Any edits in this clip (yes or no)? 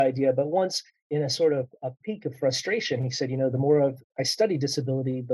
no